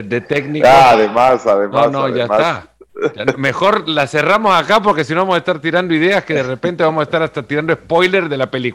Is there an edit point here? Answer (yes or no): no